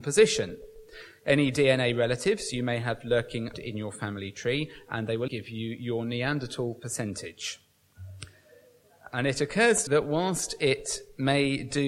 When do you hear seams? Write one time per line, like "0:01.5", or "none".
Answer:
0:03.5
0:05.3
0:09.9